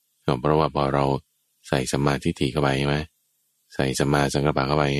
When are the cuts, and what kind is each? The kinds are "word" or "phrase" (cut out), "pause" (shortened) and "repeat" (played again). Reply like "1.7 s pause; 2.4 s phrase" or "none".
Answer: none

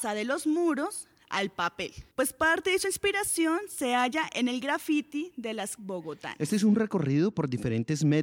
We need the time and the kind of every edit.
2.1 s pause; 5.8 s word

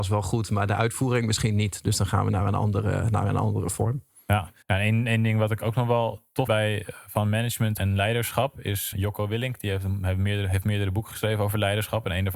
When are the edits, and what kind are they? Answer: 4.6 s pause; 6.5 s word; 7.8 s word; 8.9 s word

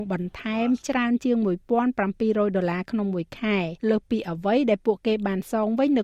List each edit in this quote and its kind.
3.8 s pause

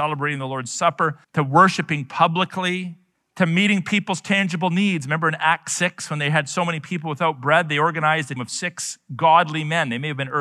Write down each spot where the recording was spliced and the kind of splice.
1.2 s pause; 3.1 s pause; 8.4 s word

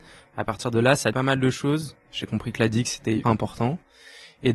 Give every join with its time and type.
1.1 s word; 3.2 s word

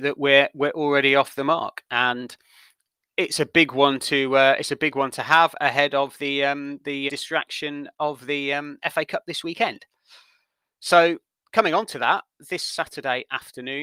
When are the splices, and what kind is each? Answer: 7.1 s word

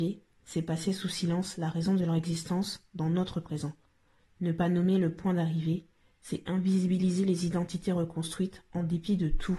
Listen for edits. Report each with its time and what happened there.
none

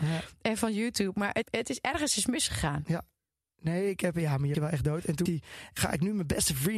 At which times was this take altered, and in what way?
1.4 s word; 4.5 s word; 5.3 s word; 5.8 s word

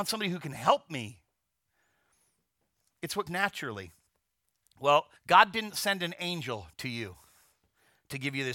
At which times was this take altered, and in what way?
3.3 s word; 5.2 s pause

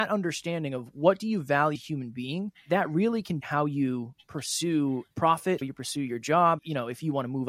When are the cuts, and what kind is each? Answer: 1.8 s word; 2.5 s word; 3.4 s word; 5.6 s word; 6.6 s word

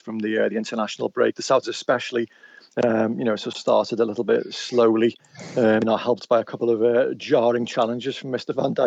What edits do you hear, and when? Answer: 1.6 s word; 5.8 s word

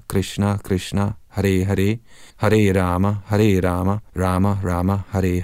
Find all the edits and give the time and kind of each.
2.3 s pause; 4.1 s pause

